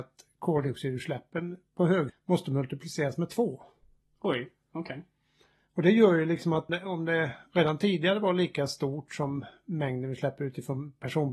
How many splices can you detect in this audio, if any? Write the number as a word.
two